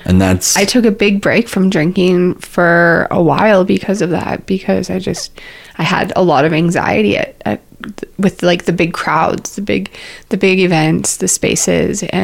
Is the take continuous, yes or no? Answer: yes